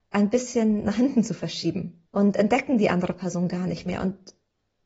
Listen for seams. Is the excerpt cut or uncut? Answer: cut